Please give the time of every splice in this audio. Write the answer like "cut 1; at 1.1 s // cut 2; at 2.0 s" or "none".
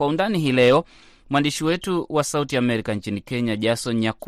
none